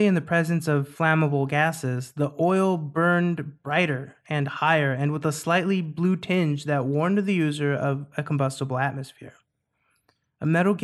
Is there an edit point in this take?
no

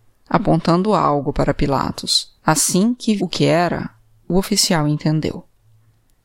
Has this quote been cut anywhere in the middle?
yes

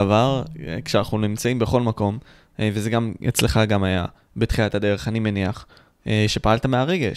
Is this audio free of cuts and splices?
yes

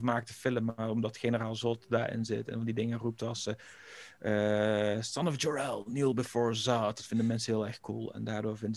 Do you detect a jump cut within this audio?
no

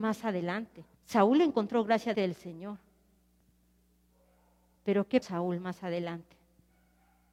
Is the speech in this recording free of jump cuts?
no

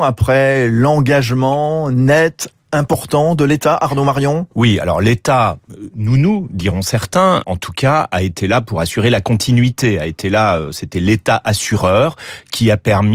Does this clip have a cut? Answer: yes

